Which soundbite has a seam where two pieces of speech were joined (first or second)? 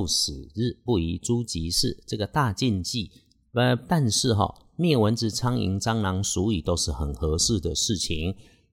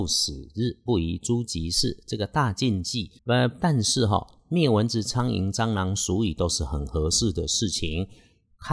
second